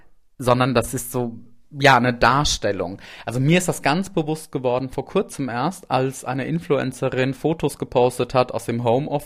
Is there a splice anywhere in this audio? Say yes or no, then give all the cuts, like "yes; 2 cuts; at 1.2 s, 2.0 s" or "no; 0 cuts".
no; 0 cuts